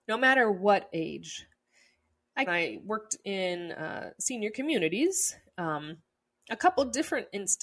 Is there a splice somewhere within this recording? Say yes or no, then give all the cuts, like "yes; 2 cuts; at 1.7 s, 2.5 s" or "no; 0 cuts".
yes; 1 cut; at 2.5 s